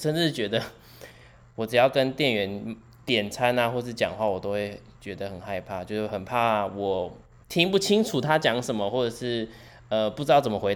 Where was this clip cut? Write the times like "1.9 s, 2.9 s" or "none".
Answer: none